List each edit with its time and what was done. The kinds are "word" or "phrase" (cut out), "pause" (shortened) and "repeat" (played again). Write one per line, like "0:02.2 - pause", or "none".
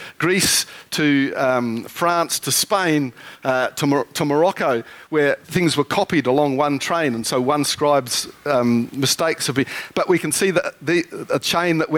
none

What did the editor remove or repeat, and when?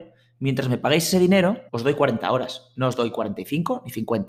0:01.7 - pause

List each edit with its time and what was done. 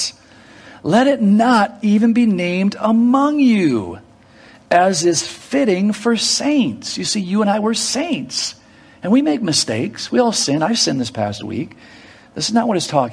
none

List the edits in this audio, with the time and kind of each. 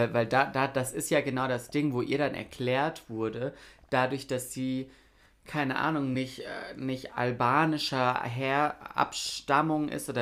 none

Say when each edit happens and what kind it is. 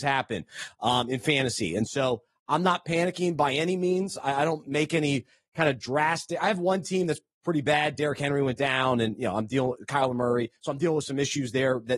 none

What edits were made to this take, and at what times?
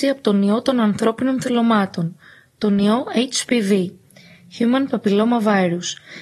none

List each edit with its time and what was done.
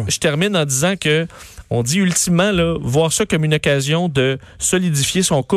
none

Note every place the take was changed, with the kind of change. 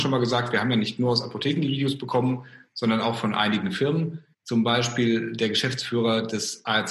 0:04.3 - pause

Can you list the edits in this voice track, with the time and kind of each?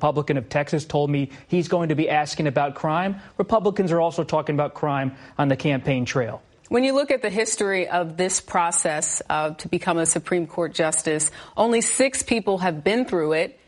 none

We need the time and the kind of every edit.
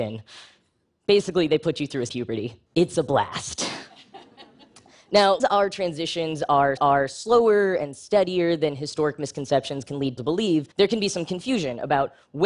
0:02.1 - word
0:02.7 - pause
0:05.4 - word
0:06.8 - repeat
0:10.2 - word
0:10.7 - pause

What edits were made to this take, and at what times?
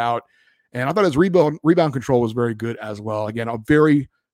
none

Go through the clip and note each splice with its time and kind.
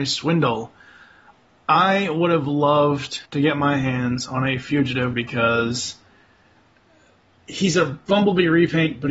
0:03.3 - pause
0:05.1 - word

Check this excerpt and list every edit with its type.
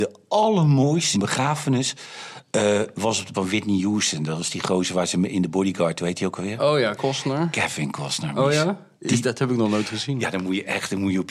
0:01.1 - phrase
0:03.3 - word
0:07.0 - word
0:09.0 - pause

